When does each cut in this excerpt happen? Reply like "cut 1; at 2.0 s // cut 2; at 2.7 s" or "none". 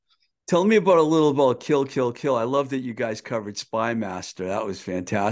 none